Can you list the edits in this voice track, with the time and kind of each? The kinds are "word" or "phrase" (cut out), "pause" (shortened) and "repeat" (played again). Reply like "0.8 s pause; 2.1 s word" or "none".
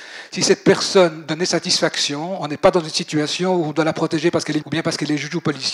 4.6 s word